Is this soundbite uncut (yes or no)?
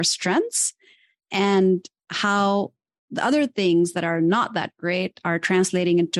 yes